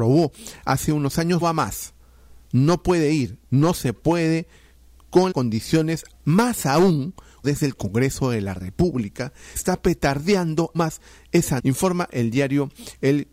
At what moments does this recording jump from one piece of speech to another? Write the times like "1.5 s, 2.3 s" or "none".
1.4 s, 5.0 s, 5.3 s, 6.1 s, 7.4 s, 9.6 s, 10.7 s, 11.6 s